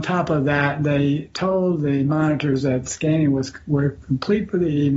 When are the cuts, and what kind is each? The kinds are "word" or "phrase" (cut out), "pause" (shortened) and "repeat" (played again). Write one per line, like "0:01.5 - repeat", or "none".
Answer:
none